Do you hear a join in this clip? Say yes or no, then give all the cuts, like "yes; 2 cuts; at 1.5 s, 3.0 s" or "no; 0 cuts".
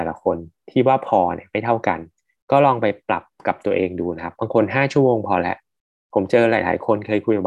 no; 0 cuts